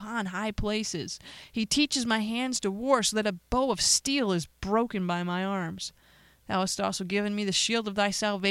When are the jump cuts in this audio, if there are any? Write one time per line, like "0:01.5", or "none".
none